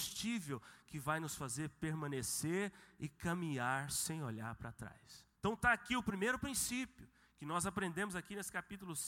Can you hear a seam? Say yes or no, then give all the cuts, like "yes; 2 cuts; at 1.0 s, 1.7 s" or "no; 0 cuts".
yes; 1 cut; at 5.3 s